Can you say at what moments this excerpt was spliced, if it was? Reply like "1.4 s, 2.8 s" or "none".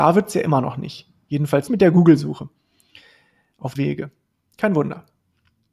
1.7 s, 3.7 s

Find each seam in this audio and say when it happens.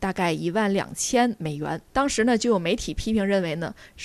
1.9 s

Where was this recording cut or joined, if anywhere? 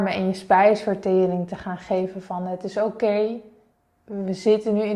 none

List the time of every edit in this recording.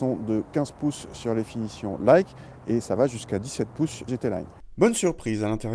4.1 s

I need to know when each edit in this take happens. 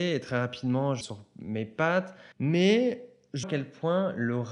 1.0 s, 2.3 s, 3.4 s

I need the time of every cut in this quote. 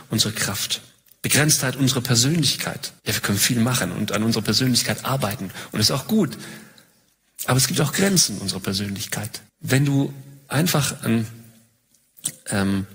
3.0 s, 9.5 s

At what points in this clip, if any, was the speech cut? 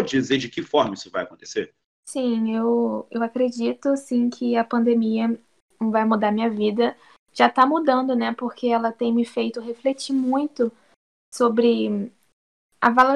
none

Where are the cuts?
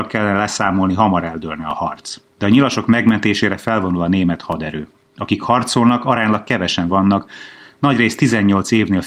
none

